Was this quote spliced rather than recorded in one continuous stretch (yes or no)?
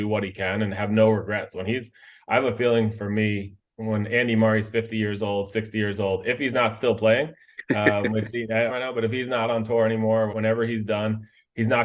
yes